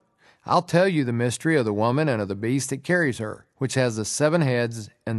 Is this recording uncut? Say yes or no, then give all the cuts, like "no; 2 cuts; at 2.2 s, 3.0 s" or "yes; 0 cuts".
no; 1 cut; at 3.5 s